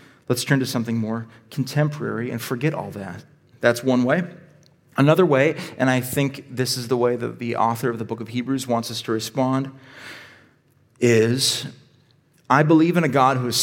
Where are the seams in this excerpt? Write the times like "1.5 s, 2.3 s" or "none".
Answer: none